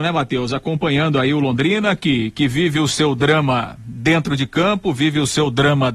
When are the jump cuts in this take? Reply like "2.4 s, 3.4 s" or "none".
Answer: none